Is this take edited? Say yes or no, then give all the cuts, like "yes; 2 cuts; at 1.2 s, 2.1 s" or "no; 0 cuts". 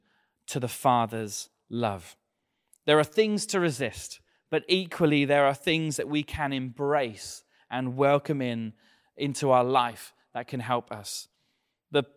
no; 0 cuts